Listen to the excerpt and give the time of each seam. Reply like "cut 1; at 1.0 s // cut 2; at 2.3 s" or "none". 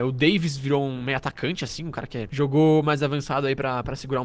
none